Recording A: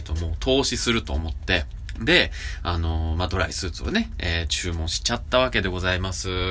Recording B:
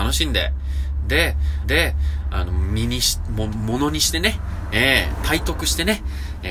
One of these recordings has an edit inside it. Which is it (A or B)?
B